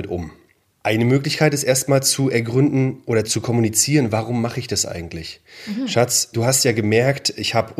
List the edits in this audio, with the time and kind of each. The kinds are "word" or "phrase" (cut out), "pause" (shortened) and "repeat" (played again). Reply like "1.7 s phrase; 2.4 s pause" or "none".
3.2 s word; 6.3 s word